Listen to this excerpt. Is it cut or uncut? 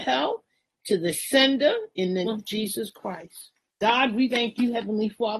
cut